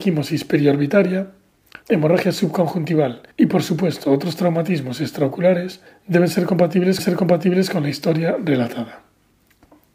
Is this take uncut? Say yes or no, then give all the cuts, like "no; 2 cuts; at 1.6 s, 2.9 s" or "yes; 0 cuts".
no; 4 cuts; at 1.8 s, 3.3 s, 5.9 s, 7.0 s